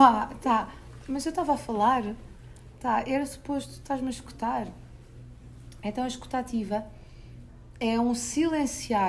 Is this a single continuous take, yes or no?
yes